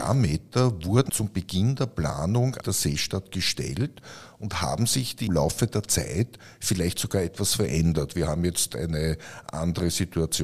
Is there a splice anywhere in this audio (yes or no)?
yes